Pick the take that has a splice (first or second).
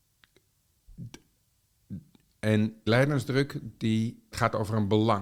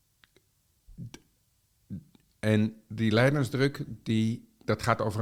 first